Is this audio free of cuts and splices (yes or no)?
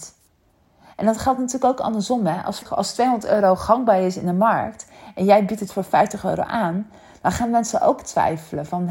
yes